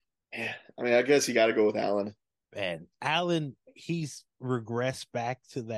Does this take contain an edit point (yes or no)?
no